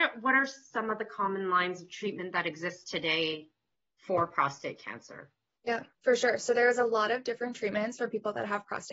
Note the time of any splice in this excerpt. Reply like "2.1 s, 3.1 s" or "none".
none